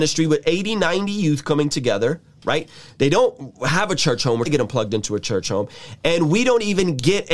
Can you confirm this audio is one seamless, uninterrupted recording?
no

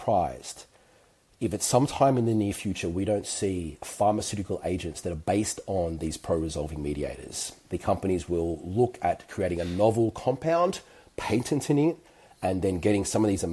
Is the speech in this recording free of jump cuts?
yes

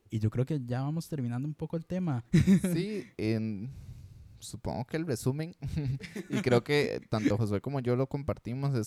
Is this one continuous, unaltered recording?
yes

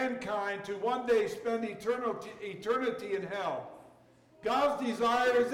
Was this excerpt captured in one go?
yes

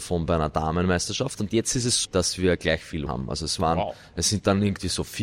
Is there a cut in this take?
yes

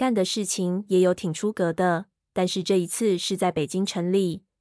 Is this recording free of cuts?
yes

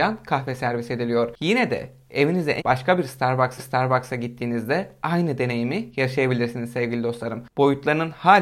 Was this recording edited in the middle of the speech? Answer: yes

